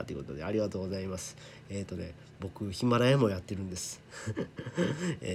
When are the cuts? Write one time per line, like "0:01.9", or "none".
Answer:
none

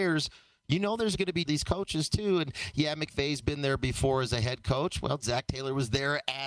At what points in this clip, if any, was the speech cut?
0:01.5

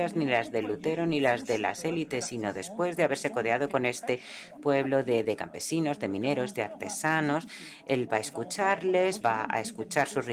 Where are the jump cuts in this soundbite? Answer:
0:09.2

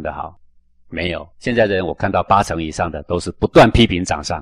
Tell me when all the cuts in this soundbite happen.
0:01.3

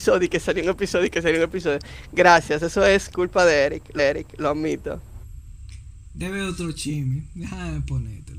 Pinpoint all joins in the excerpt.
0:04.0

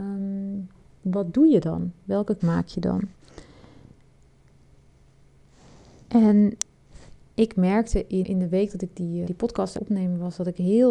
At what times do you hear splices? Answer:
0:02.4
0:08.2
0:09.3
0:09.8

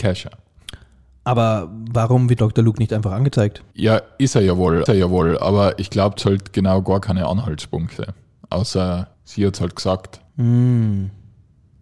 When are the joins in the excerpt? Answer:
0:02.4
0:03.7
0:04.9
0:06.2
0:09.1
0:10.3

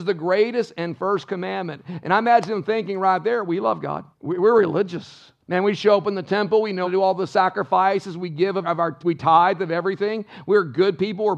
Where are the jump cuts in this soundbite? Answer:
0:04.1
0:05.4
0:06.8
0:08.6
0:09.0

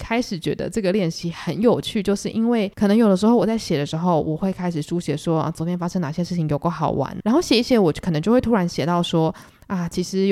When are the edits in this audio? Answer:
0:02.7
0:07.2

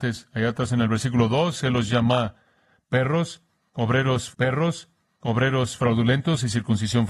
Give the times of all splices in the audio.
0:04.3

